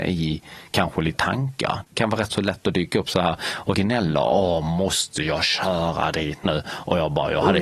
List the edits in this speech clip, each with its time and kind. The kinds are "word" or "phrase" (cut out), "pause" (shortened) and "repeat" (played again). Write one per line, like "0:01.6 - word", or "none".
0:01.1 - word
0:01.9 - pause
0:03.7 - phrase